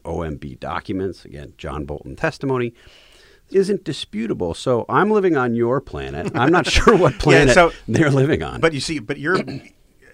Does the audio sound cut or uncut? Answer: cut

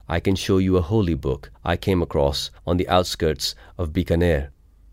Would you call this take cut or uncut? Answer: cut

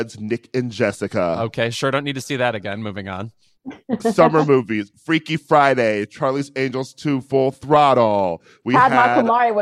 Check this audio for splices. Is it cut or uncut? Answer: uncut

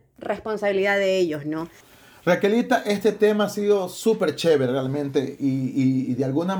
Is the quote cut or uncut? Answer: uncut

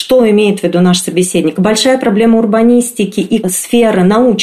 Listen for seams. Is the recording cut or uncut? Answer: cut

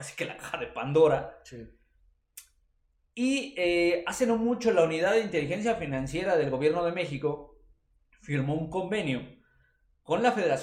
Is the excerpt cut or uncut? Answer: uncut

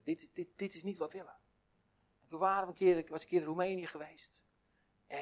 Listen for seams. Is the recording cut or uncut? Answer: cut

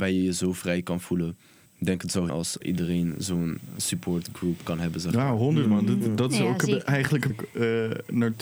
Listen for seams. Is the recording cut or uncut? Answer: cut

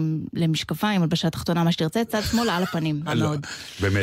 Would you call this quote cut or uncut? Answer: cut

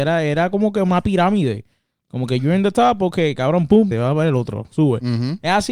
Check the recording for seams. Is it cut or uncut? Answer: cut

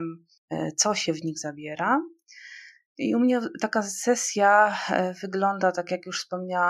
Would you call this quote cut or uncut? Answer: uncut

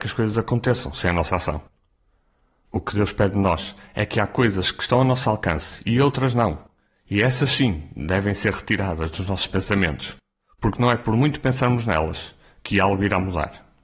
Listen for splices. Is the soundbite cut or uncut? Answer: uncut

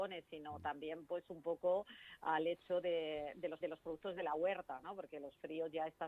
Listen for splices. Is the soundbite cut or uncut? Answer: cut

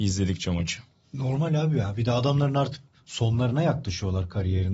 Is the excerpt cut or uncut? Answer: uncut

